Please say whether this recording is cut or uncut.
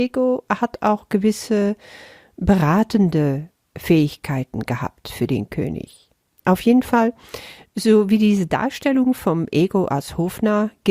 uncut